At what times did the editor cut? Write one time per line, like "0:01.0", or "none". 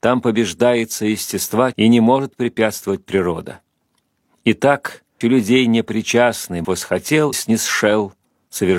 0:01.7
0:05.2
0:06.6
0:07.3

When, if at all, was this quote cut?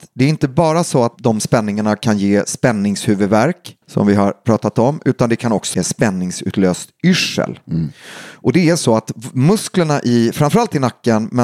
0:03.8
0:05.7

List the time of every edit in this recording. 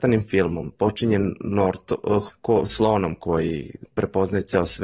0:02.3
0:03.9

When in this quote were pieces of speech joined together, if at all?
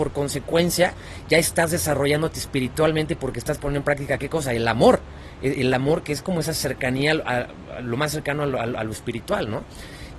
none

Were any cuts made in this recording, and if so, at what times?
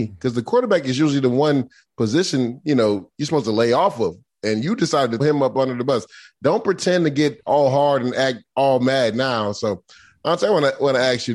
0:05.2

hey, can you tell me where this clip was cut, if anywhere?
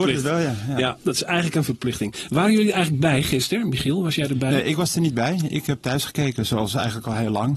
0:05.8

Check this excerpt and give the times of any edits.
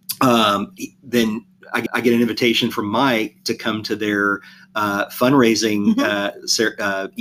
0:01.9

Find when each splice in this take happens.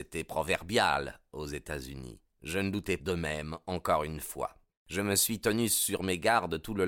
0:02.3
0:03.0
0:04.7

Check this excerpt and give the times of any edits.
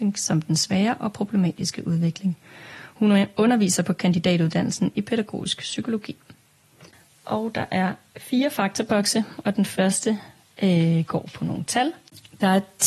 none

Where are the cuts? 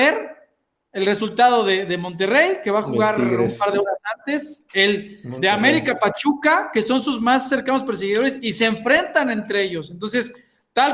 none

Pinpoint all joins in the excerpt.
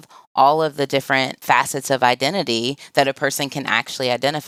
0:01.4

